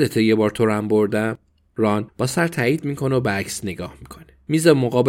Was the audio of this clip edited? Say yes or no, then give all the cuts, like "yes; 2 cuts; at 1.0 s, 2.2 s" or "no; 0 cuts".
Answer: no; 0 cuts